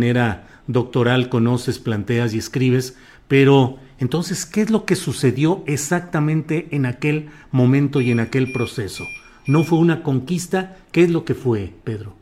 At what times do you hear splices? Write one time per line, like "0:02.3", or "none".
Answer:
none